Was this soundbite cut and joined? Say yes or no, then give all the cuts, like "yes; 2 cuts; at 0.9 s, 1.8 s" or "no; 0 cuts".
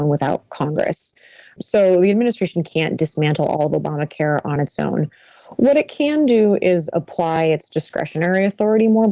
no; 0 cuts